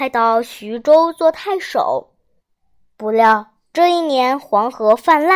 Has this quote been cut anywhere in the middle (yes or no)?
yes